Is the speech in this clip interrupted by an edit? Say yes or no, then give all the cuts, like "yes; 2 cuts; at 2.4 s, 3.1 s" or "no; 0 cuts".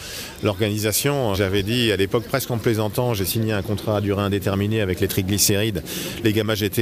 yes; 1 cut; at 1.3 s